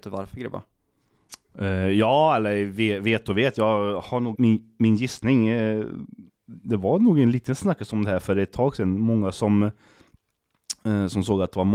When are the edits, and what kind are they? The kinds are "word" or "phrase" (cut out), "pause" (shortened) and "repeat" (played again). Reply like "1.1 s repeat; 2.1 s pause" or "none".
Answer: 4.3 s word